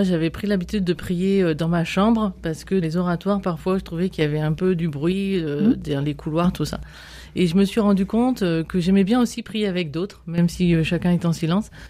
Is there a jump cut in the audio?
yes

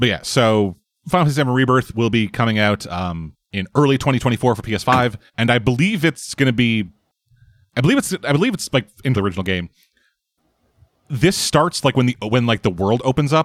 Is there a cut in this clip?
yes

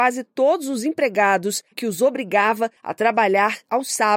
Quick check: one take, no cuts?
no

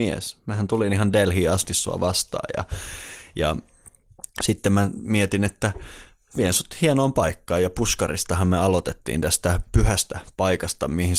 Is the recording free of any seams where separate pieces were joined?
yes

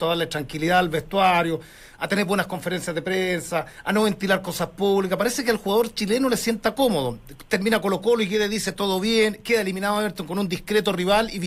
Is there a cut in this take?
no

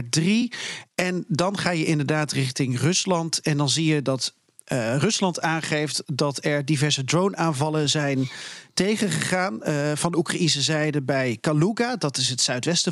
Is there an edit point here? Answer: no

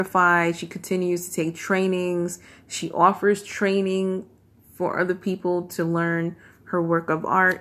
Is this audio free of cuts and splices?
yes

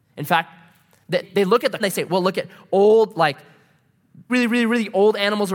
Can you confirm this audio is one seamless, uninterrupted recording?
no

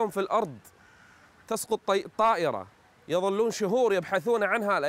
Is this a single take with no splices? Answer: yes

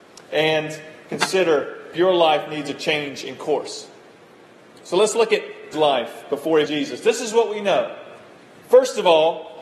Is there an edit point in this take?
yes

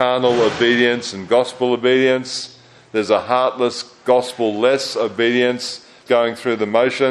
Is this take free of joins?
no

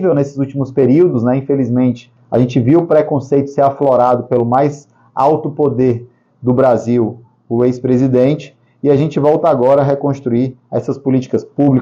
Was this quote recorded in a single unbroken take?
yes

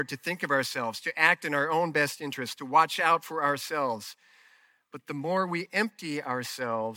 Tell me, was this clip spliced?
no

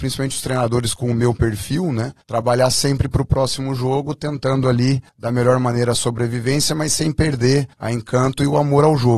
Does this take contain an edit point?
yes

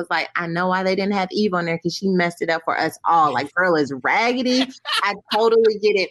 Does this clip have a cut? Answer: no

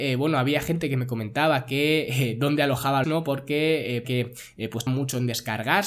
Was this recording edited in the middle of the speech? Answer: yes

